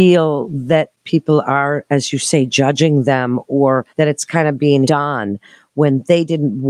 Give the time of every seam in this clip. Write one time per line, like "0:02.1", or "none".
0:03.9
0:04.8